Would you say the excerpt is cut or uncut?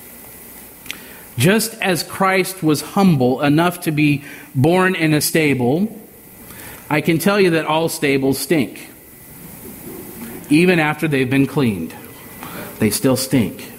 cut